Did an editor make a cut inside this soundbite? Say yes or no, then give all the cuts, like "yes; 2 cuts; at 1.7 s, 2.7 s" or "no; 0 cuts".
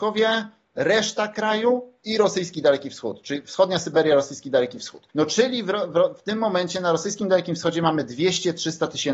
yes; 1 cut; at 5.1 s